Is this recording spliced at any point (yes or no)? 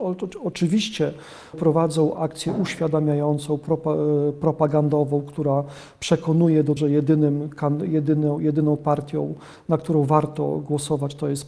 yes